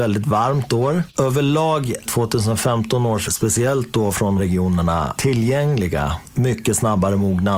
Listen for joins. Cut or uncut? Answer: cut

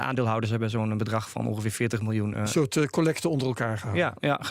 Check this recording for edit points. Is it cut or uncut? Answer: uncut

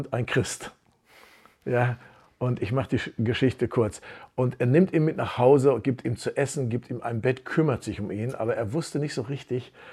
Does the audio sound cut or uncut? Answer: uncut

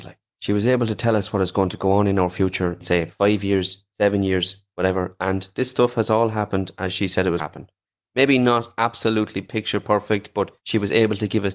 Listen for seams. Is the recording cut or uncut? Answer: cut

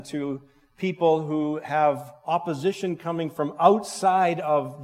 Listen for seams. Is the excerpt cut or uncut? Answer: uncut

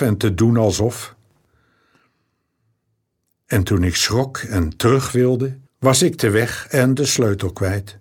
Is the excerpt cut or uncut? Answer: cut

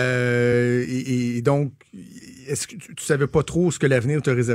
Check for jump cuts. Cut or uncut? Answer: uncut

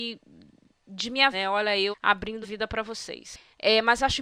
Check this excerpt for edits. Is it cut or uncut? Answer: cut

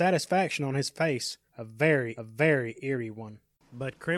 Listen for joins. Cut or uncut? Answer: cut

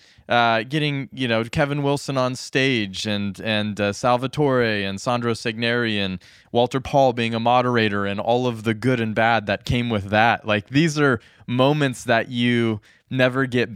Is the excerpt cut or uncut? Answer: uncut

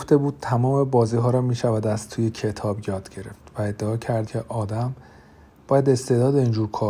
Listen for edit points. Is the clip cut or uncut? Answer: cut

